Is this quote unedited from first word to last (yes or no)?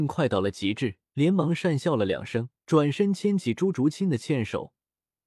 no